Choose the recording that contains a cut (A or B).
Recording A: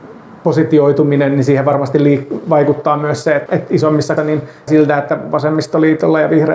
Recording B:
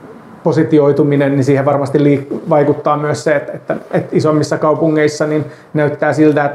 A